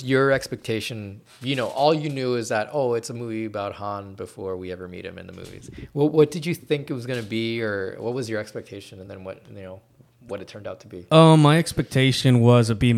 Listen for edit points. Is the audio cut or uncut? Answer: uncut